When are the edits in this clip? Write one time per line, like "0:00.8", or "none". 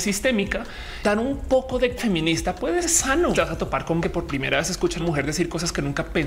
0:01.0
0:02.0
0:02.8
0:03.3
0:04.0
0:05.0